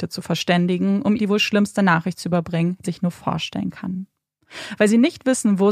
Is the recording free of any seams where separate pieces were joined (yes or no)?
no